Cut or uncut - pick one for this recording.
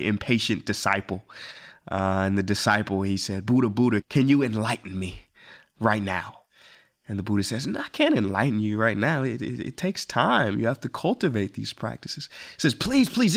uncut